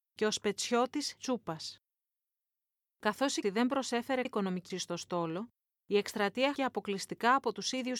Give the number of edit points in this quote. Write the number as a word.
five